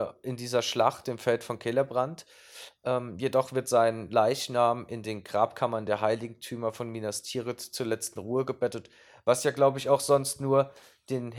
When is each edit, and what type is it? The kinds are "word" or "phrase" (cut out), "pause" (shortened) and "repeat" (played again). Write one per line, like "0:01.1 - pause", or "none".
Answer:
0:01.0 - word